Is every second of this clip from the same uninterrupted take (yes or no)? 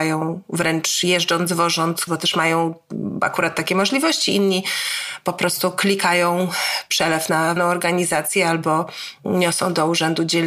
no